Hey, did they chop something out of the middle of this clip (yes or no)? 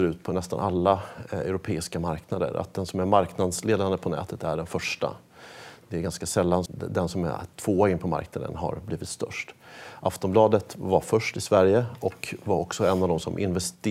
yes